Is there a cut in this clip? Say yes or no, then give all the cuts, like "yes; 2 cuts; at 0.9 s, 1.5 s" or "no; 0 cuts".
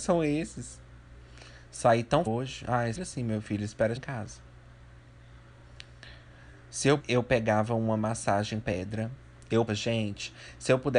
yes; 6 cuts; at 2.3 s, 2.9 s, 4.0 s, 7.0 s, 8.6 s, 9.7 s